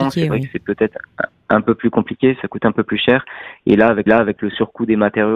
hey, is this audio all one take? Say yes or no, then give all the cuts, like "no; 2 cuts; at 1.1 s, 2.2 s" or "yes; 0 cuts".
no; 1 cut; at 4.1 s